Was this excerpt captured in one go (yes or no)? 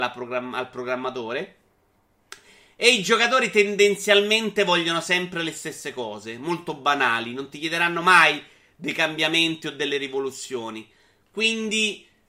yes